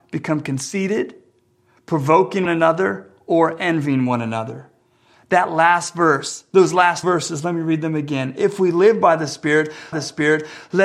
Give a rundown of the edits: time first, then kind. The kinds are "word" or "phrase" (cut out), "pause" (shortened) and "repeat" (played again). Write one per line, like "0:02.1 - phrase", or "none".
0:02.5 - word
0:07.0 - word
0:09.9 - repeat